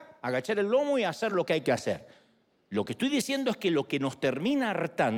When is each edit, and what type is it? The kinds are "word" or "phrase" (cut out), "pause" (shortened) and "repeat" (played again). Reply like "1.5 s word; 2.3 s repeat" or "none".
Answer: none